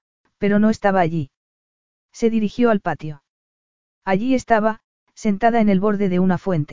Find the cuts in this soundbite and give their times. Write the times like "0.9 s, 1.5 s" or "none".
none